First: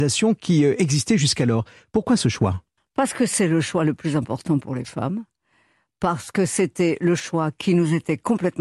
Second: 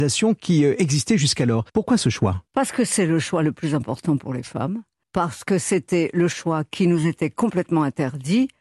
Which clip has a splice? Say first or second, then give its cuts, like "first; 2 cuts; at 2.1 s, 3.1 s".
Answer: second; 3 cuts; at 1.7 s, 2.5 s, 5.0 s